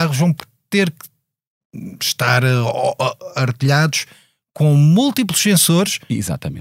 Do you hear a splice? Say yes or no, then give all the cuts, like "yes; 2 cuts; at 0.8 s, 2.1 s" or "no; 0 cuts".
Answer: no; 0 cuts